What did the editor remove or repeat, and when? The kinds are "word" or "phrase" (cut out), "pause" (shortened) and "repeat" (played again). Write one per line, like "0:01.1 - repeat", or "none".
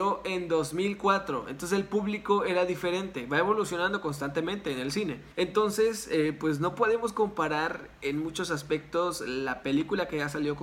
0:05.3 - pause